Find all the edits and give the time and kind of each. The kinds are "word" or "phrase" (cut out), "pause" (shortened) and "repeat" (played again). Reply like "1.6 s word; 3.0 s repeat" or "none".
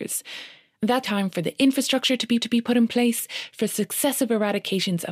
1.0 s word; 2.4 s repeat